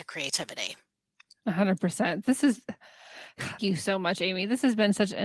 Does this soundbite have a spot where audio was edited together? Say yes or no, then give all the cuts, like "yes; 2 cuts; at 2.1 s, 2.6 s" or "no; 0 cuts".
yes; 1 cut; at 3.6 s